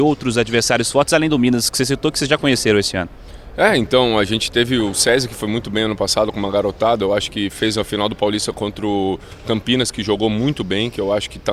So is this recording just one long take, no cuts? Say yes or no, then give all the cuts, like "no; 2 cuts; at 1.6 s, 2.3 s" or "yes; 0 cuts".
yes; 0 cuts